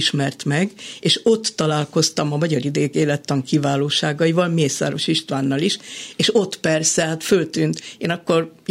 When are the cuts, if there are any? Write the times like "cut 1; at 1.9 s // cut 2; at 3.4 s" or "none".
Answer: none